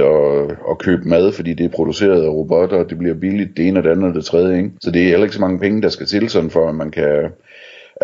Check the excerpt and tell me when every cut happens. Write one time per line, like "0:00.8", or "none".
0:04.8